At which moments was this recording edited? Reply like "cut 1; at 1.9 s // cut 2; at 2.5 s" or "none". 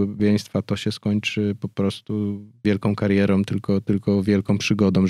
cut 1; at 2.6 s